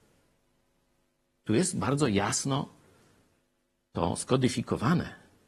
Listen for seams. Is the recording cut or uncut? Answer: uncut